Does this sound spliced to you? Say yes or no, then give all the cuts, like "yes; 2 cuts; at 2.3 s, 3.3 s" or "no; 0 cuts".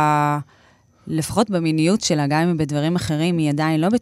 no; 0 cuts